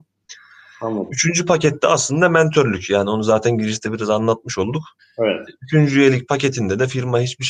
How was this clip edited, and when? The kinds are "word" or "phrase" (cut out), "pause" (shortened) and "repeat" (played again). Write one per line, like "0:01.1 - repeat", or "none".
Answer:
0:05.0 - pause